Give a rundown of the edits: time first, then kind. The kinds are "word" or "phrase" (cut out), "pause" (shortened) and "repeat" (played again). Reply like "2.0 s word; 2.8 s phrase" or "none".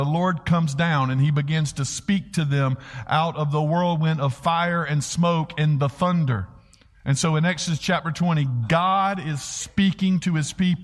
none